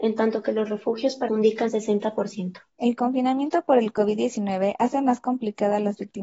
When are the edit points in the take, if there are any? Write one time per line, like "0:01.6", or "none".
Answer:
0:01.3
0:01.7
0:02.7